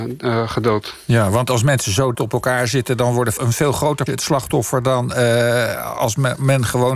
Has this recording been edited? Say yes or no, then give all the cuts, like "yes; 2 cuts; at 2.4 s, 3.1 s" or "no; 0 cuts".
yes; 3 cuts; at 2.1 s, 3.4 s, 4.1 s